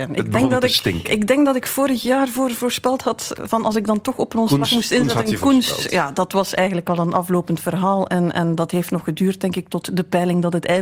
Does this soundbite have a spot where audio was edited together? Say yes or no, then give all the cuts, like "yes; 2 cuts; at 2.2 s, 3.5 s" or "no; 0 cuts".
no; 0 cuts